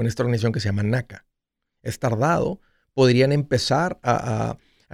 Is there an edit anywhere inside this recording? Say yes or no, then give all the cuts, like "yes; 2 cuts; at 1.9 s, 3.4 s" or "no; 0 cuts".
no; 0 cuts